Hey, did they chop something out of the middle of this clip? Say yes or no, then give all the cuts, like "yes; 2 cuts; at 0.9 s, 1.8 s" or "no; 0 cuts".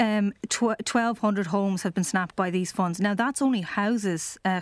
yes; 1 cut; at 2.3 s